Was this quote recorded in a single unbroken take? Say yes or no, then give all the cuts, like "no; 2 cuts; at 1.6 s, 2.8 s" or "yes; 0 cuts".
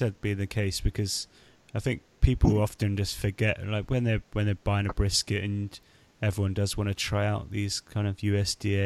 yes; 0 cuts